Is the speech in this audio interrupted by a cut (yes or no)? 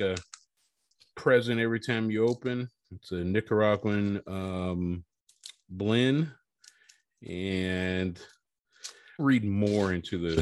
yes